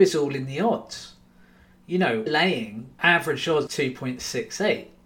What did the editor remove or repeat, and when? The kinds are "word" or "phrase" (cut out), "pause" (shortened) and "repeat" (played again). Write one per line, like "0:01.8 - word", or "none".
0:02.3 - word
0:03.0 - word
0:03.7 - word